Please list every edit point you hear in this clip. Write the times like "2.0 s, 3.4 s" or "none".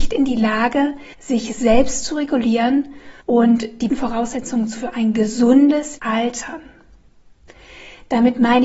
1.1 s, 3.2 s, 3.9 s, 4.7 s, 6.0 s